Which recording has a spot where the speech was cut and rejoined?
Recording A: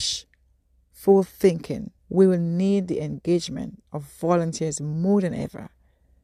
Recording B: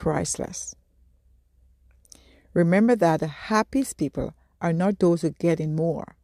A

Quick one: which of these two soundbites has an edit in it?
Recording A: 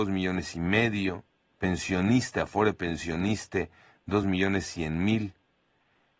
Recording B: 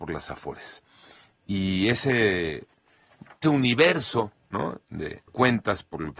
B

